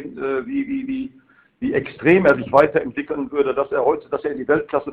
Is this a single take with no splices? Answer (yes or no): yes